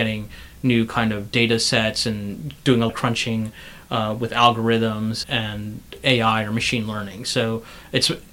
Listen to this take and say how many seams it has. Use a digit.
2